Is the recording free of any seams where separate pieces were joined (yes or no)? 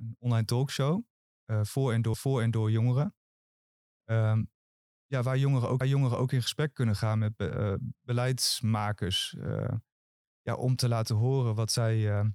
no